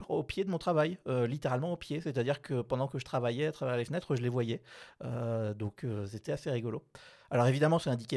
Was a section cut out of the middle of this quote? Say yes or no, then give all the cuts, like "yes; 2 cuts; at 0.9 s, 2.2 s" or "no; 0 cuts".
no; 0 cuts